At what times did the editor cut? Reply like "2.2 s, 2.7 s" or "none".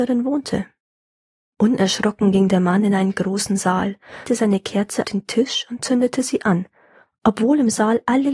4.3 s, 5.0 s